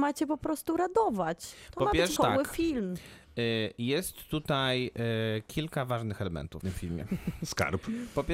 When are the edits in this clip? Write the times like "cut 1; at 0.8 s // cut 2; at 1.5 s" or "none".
cut 1; at 2.2 s // cut 2; at 6.6 s